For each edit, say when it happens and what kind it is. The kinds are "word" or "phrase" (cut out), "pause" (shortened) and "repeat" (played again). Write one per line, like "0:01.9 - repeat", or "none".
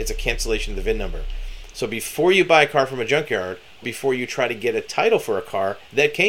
0:03.8 - word